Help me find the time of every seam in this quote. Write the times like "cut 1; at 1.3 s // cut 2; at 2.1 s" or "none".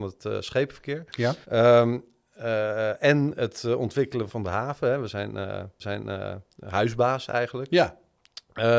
cut 1; at 1.4 s // cut 2; at 4.3 s // cut 3; at 5.8 s